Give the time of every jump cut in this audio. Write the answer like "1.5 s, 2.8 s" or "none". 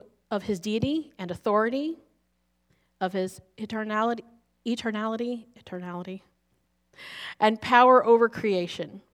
none